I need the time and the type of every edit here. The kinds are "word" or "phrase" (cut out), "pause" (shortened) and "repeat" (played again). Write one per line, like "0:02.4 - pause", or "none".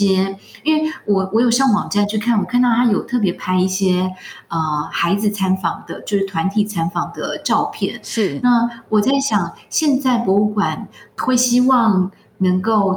none